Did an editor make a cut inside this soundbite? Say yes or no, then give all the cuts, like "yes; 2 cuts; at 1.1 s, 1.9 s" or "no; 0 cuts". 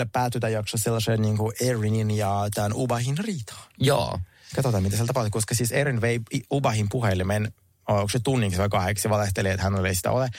no; 0 cuts